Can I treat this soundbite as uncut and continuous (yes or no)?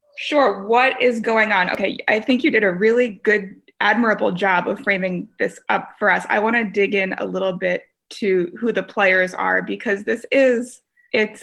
yes